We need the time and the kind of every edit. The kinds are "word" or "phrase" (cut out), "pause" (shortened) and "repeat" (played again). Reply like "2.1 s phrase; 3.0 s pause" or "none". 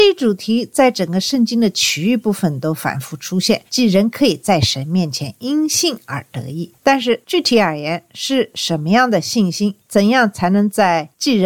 3.7 s pause